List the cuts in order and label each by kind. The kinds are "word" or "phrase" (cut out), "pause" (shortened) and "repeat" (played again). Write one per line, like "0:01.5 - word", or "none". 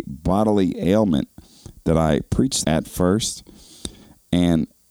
0:02.6 - phrase